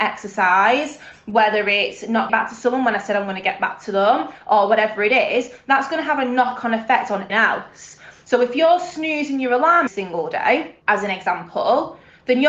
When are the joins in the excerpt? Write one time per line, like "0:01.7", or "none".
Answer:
0:02.3
0:07.3
0:09.9
0:10.8